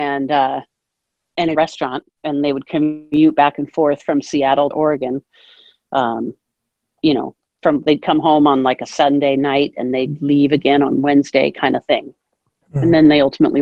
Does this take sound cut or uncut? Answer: cut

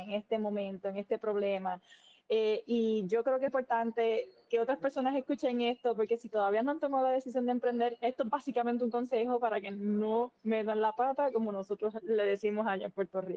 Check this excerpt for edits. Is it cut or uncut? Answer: cut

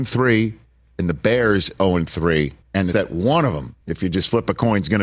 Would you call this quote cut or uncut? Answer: cut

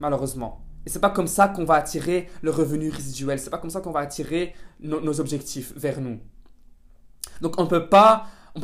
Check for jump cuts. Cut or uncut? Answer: uncut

